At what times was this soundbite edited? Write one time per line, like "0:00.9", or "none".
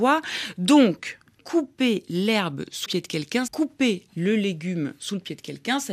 0:02.9
0:03.5